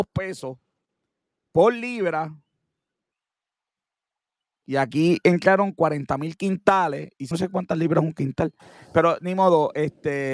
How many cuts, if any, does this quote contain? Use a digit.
1